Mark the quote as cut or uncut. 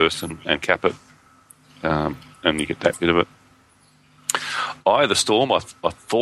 uncut